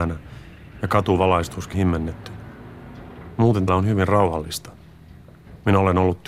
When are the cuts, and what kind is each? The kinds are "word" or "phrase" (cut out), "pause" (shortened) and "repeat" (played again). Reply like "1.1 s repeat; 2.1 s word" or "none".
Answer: 1.7 s word; 3.7 s word